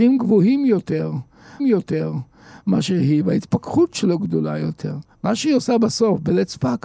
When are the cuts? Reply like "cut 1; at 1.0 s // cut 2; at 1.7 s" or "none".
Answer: cut 1; at 1.6 s